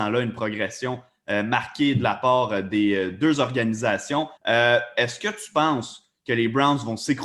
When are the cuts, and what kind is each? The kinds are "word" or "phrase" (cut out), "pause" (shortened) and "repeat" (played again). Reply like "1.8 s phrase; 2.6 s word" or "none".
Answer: 4.4 s pause